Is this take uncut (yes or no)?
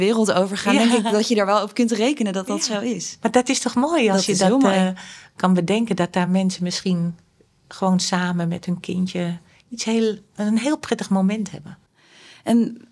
yes